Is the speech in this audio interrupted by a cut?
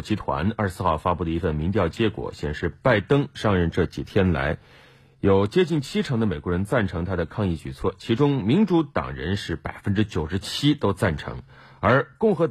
no; 0 cuts

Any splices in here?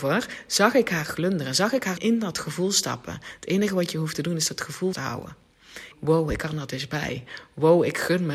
yes; 3 cuts; at 2.0 s, 4.9 s, 5.9 s

